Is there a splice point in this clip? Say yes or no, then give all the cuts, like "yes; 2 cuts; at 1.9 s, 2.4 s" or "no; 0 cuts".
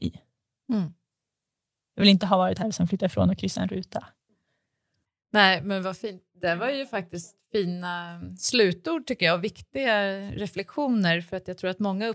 no; 0 cuts